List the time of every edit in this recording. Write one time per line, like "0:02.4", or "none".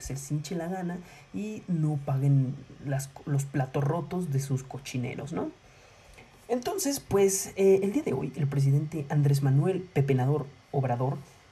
none